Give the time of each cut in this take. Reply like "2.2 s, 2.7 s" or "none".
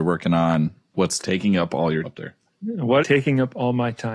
0.9 s, 2.0 s, 3.0 s